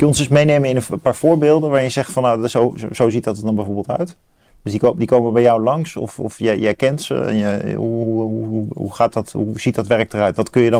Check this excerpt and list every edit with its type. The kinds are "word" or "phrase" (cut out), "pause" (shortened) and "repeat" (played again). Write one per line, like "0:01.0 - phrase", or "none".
none